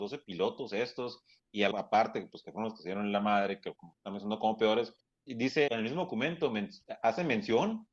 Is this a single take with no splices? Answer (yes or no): no